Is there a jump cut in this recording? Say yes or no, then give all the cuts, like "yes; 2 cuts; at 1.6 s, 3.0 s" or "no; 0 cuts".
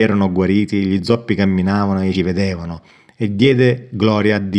yes; 1 cut; at 2.1 s